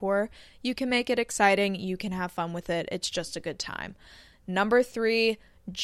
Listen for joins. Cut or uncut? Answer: uncut